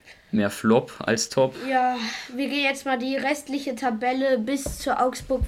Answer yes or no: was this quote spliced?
no